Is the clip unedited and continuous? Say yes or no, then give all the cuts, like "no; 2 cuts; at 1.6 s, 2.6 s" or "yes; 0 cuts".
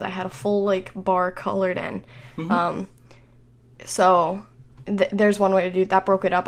yes; 0 cuts